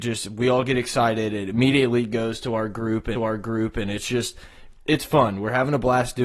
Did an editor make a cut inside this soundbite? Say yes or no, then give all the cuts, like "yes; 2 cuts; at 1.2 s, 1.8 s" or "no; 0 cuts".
yes; 1 cut; at 3.2 s